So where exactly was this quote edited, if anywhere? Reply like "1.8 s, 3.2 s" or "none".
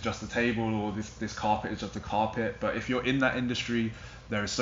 none